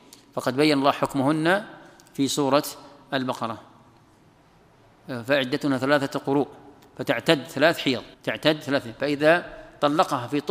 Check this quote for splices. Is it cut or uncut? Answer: cut